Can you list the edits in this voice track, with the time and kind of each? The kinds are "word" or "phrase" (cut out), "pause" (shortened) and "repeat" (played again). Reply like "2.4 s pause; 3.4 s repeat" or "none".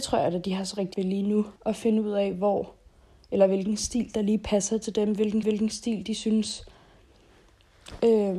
0.9 s word; 1.6 s pause; 5.4 s repeat